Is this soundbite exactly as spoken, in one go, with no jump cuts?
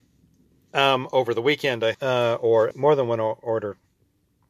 no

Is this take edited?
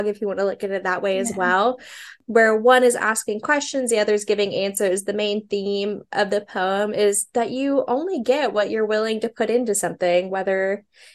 no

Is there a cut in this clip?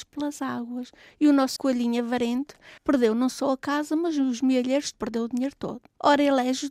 yes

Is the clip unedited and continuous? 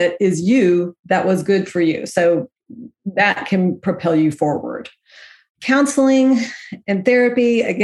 yes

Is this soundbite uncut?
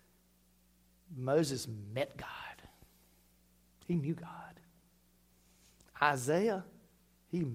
yes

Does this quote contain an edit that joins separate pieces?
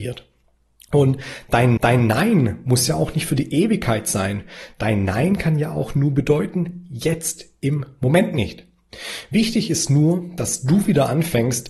yes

